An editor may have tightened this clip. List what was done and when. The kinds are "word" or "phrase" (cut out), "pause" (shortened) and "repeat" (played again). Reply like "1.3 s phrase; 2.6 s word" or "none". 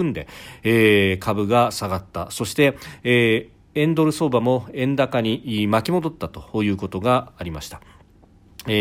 none